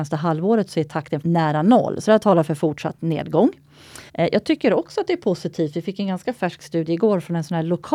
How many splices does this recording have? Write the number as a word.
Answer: two